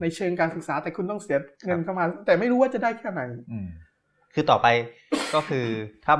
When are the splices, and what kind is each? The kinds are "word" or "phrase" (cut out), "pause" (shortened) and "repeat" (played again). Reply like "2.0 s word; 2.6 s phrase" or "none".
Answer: none